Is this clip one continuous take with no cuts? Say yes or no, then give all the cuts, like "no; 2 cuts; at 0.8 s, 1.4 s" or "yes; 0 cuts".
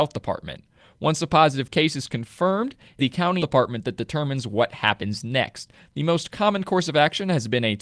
no; 2 cuts; at 3.0 s, 3.4 s